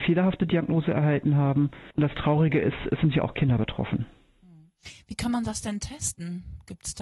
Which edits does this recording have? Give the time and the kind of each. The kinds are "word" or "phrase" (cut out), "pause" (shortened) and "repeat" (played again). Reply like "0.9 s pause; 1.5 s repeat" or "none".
1.9 s pause